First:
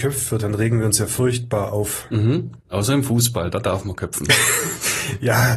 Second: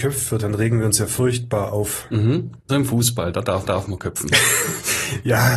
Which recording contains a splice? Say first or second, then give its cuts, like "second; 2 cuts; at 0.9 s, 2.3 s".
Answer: second; 2 cuts; at 2.7 s, 3.6 s